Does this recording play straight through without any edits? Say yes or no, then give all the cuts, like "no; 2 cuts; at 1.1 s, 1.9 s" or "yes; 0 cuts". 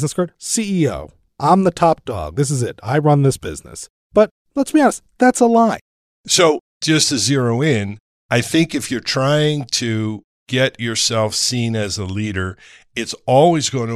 yes; 0 cuts